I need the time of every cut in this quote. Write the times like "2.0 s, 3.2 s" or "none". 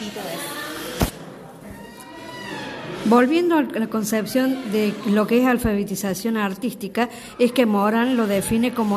none